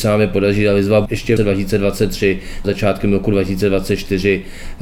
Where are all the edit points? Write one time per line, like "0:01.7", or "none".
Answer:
0:01.1
0:01.4
0:02.6